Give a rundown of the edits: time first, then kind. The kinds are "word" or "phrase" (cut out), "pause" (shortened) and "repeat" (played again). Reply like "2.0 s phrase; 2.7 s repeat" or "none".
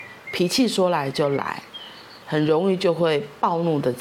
2.2 s pause